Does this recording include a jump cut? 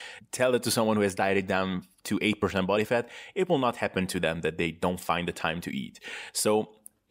no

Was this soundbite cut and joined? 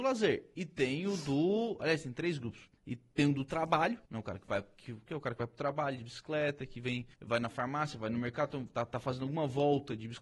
yes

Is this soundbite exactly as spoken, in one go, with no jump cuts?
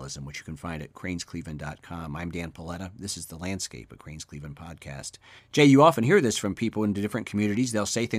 no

